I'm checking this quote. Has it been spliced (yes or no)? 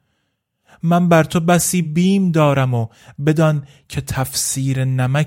no